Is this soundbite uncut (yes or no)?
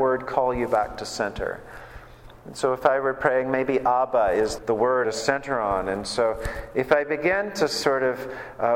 no